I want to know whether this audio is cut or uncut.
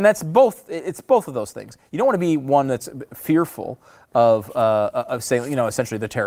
uncut